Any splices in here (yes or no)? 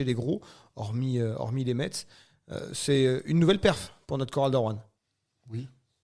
no